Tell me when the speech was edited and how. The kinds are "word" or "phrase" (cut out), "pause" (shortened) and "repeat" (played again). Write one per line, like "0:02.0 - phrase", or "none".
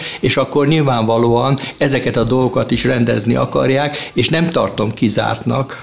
none

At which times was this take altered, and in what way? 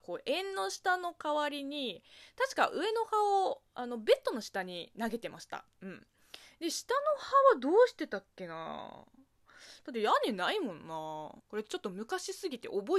0:11.4 - pause

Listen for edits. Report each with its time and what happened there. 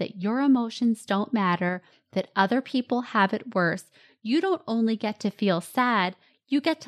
none

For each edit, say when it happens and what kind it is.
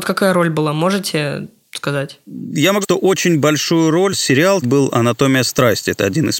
0:02.8 - word
0:04.1 - word
0:04.6 - word

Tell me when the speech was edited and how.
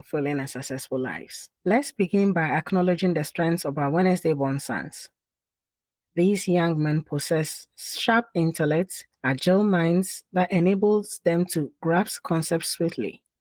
0:01.6 - pause
0:09.1 - pause

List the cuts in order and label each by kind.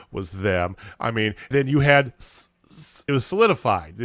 0:01.5 - word
0:03.1 - word

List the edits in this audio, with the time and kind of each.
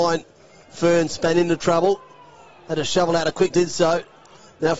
0:03.5 - word

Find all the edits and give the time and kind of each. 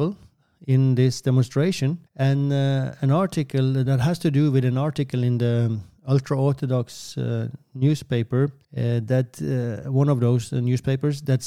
0:02.1 - pause
0:03.9 - word
0:08.6 - pause

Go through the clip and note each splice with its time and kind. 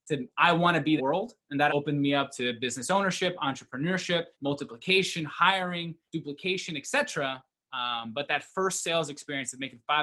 0:01.0 - word
0:01.7 - word
0:04.3 - pause
0:06.1 - pause

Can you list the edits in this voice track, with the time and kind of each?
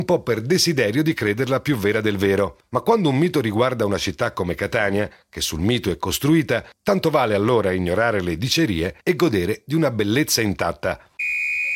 0:09.0 - pause

